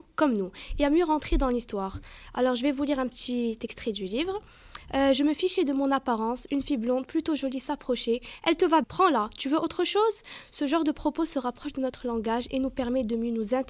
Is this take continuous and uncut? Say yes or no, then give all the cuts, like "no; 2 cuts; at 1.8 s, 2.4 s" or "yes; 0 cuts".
no; 1 cut; at 8.8 s